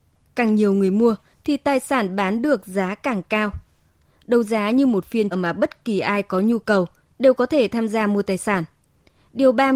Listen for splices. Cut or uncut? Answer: cut